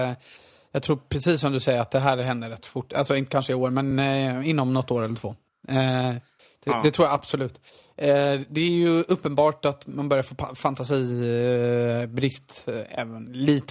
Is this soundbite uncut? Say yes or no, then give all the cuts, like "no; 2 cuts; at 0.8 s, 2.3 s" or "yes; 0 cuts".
yes; 0 cuts